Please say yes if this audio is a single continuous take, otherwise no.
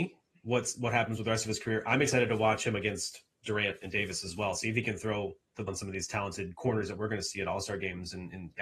no